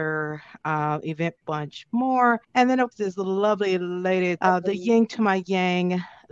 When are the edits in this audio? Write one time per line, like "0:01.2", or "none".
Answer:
0:01.4
0:02.4
0:02.9
0:04.4